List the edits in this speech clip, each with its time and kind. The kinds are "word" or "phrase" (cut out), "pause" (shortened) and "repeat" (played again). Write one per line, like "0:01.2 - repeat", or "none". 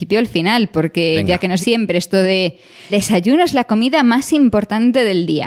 0:01.6 - word
0:02.9 - word